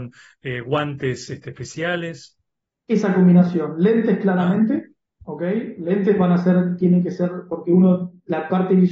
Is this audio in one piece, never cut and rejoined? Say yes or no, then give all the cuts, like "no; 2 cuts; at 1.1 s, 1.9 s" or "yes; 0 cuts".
yes; 0 cuts